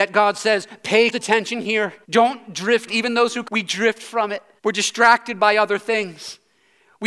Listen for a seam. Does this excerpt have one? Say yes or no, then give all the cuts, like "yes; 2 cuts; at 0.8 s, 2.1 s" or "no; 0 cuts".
yes; 5 cuts; at 1.1 s, 2.0 s, 2.9 s, 3.4 s, 4.6 s